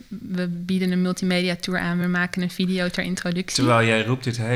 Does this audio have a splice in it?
no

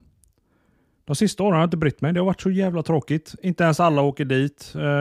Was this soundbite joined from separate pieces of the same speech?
no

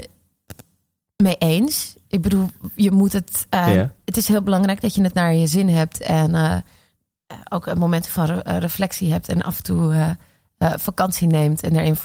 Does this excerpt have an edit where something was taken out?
no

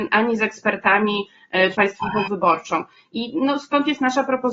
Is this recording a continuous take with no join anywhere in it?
no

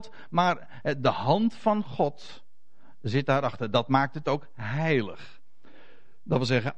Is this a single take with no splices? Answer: yes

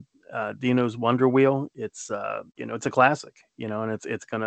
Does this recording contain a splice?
yes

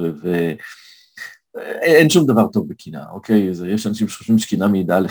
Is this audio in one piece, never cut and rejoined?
yes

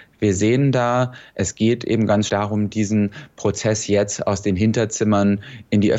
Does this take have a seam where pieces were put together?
yes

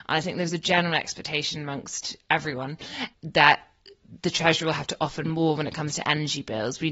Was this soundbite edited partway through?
no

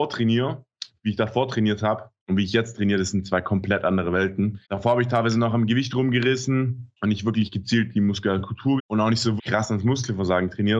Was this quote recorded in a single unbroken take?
no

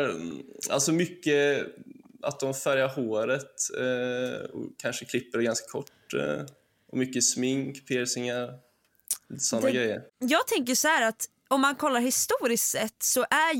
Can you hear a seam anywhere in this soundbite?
yes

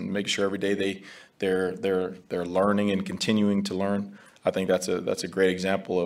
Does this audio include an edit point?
no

